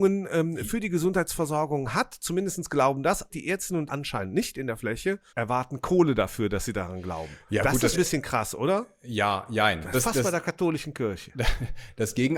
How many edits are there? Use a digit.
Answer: 5